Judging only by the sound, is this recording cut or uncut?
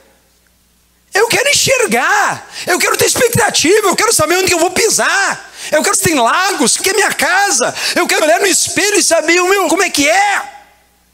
cut